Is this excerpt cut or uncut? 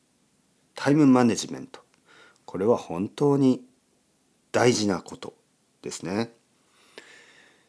uncut